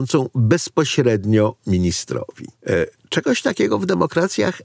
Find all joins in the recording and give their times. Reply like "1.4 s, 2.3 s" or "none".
2.6 s